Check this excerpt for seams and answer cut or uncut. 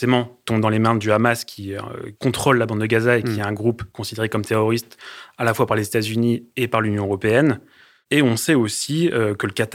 uncut